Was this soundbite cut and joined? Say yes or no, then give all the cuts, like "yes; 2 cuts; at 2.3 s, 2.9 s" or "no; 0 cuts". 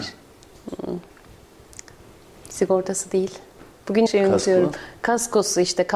yes; 2 cuts; at 1.1 s, 4.1 s